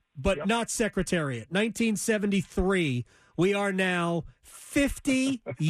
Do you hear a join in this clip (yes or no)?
no